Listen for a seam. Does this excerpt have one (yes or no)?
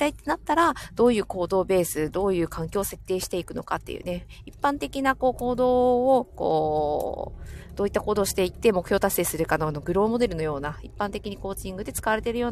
no